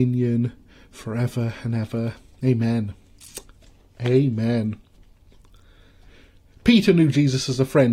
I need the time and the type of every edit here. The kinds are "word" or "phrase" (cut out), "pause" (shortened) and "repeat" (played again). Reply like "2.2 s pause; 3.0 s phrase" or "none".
none